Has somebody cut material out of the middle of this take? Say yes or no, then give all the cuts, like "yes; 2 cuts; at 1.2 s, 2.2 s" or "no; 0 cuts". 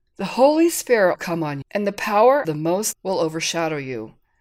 yes; 4 cuts; at 1.2 s, 1.6 s, 2.4 s, 2.9 s